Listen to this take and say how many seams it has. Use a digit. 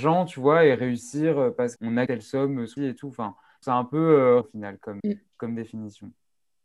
6